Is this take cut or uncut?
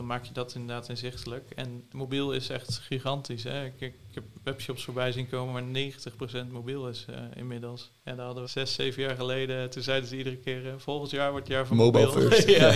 cut